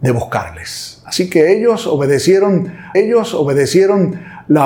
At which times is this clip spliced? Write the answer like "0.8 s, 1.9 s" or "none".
2.9 s